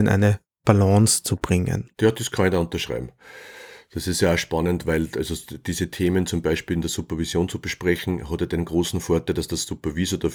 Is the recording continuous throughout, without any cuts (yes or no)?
yes